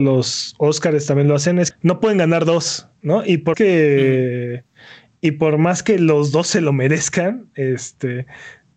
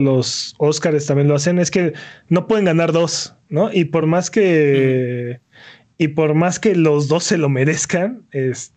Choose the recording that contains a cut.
first; 2 cuts; at 1.7 s, 3.5 s

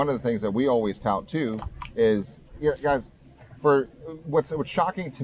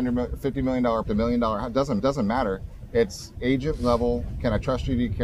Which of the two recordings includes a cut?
second; 3 cuts; at 1.0 s, 2.0 s, 3.3 s

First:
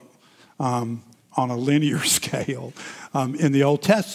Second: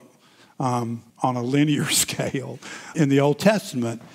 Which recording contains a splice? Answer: second; 2 cuts; at 1.1 s, 2.9 s

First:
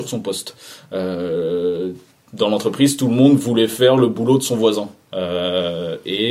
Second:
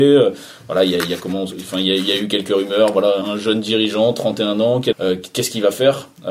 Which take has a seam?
second; 2 cuts; at 3.2 s, 4.9 s

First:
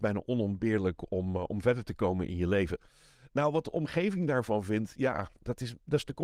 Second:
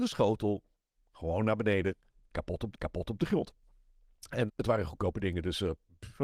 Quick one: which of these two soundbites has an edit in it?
second; 2 cuts; at 2.7 s, 4.5 s

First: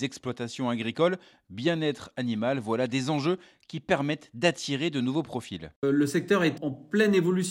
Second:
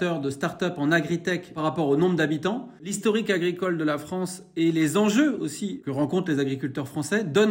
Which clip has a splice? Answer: first; 1 cut; at 6.6 s

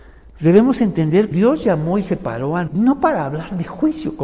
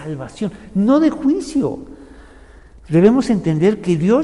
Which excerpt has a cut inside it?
first; 2 cuts; at 1.3 s, 2.7 s

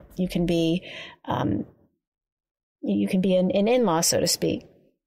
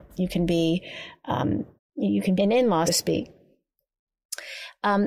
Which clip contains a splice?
second; 3 cuts; at 1.8 s, 2.4 s, 2.9 s

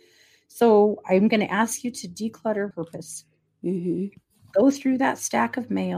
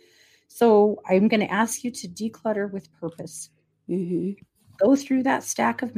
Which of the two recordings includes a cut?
first; 1 cut; at 2.7 s

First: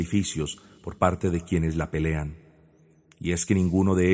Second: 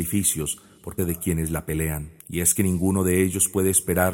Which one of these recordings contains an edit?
second; 2 cuts; at 1.0 s, 2.2 s

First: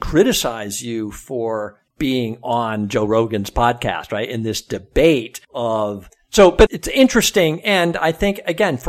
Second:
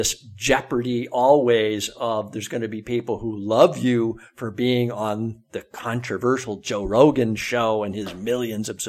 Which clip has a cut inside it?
first; 3 cuts; at 1.9 s, 5.4 s, 6.7 s

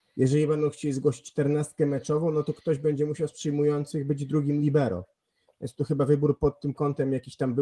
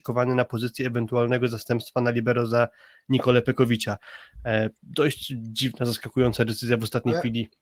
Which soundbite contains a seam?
second; 1 cut; at 4.8 s

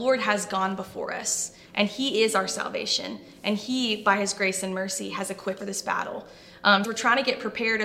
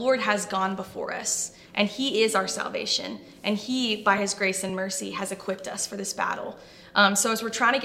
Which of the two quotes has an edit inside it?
first; 2 cuts; at 5.6 s, 6.8 s

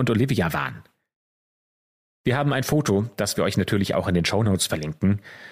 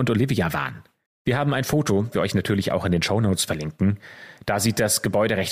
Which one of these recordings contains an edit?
second; 2 cuts; at 1.1 s, 2.1 s

